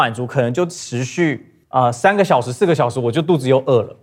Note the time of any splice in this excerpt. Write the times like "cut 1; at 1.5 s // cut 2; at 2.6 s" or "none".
cut 1; at 1.6 s